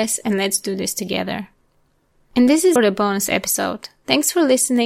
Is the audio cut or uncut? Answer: cut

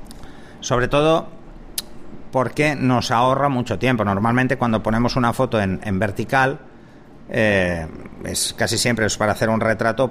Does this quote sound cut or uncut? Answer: uncut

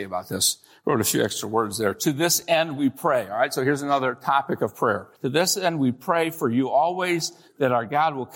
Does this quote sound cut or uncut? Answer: cut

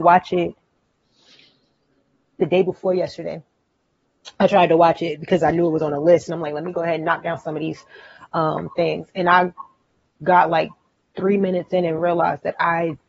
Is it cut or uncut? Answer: uncut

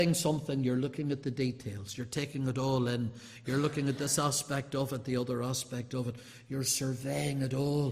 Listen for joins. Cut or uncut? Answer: uncut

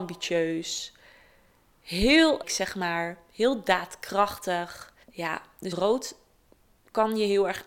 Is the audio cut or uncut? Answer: cut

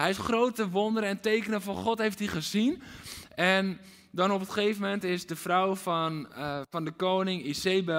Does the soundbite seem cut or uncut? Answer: uncut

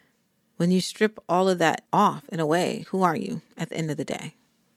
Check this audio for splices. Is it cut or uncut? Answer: cut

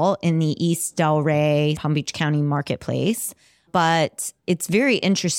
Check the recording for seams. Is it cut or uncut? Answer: cut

